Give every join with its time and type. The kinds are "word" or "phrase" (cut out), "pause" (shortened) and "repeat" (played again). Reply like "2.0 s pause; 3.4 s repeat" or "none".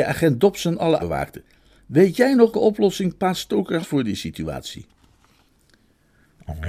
1.0 s word; 2.5 s word; 3.8 s word